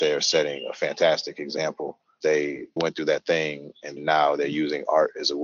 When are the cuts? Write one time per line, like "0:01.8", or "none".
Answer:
0:02.2
0:02.8
0:04.0